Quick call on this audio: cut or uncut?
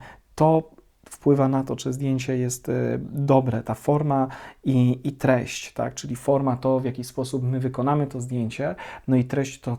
uncut